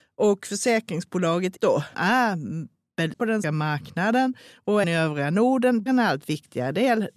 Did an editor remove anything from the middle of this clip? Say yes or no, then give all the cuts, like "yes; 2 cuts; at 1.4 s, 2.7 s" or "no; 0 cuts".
yes; 6 cuts; at 1.6 s, 1.9 s, 3.1 s, 3.4 s, 4.8 s, 5.9 s